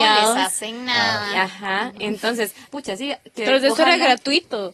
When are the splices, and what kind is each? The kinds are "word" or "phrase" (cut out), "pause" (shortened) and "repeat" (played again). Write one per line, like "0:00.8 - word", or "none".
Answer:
0:02.7 - phrase